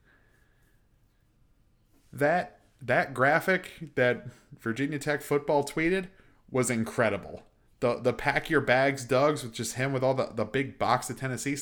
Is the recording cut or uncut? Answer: uncut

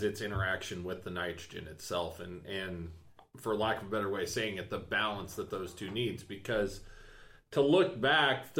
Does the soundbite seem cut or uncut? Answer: uncut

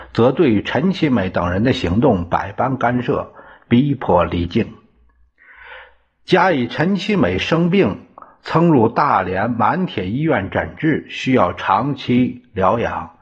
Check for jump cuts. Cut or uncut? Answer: uncut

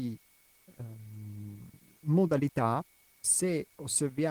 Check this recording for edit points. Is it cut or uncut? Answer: cut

